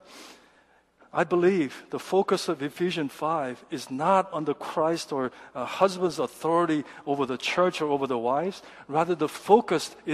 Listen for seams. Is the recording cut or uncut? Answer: uncut